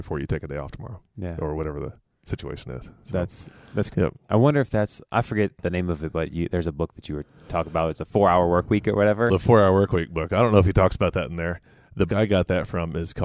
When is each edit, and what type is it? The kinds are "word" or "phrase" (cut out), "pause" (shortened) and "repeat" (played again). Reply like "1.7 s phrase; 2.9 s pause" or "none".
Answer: 3.9 s word; 9.3 s word; 12.1 s word